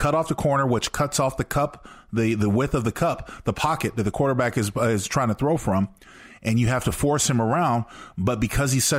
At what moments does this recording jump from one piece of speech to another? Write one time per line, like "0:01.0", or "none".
none

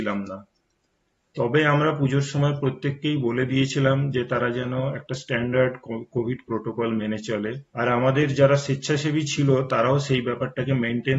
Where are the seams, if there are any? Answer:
0:07.7

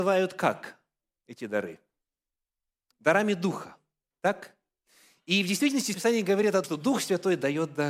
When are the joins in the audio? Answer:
0:05.9
0:06.6

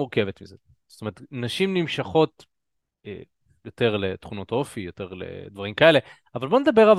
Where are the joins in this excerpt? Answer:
none

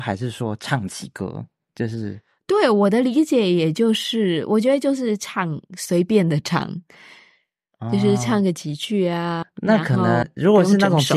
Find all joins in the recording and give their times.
none

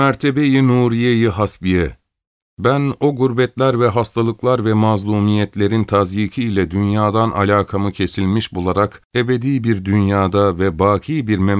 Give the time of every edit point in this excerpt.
0:09.1

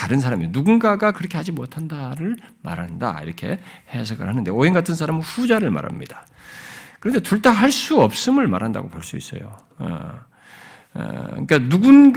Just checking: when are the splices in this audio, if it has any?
0:01.1

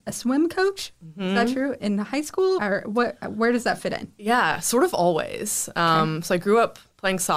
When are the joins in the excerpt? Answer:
0:01.8
0:02.6

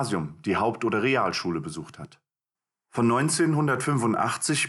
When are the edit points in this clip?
none

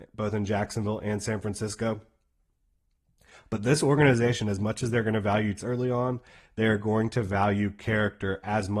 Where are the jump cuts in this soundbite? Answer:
0:05.6

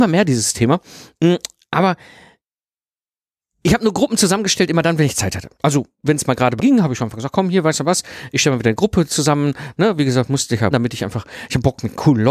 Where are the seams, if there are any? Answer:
0:06.6
0:10.7

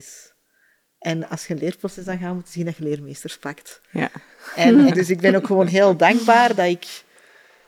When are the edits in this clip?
0:04.9

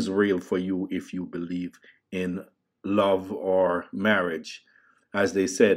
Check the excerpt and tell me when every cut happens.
0:01.8

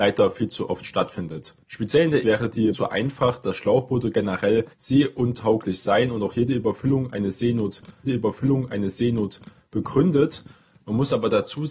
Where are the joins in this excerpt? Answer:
0:01.6
0:02.2
0:02.7
0:04.7
0:08.0

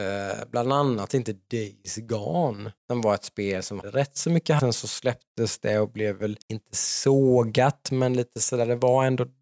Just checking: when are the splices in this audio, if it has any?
0:02.8
0:03.8
0:04.6
0:06.4

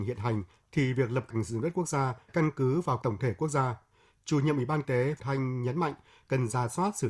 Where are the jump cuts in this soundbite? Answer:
0:01.3
0:02.3
0:03.0
0:04.8
0:05.2

